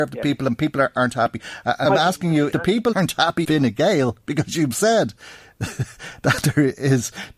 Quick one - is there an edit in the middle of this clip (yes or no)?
yes